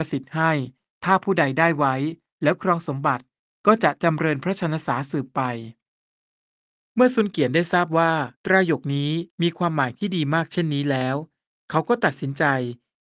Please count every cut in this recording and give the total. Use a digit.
2